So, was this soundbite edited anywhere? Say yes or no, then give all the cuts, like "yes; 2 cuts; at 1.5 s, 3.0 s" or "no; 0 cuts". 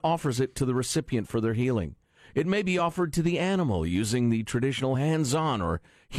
no; 0 cuts